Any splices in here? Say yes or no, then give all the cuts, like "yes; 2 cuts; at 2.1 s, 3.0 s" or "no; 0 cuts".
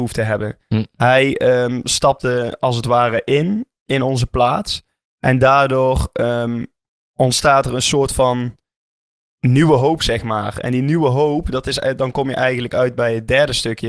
no; 0 cuts